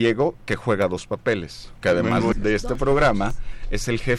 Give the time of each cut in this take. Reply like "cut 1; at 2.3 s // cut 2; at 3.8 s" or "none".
cut 1; at 1.8 s // cut 2; at 2.3 s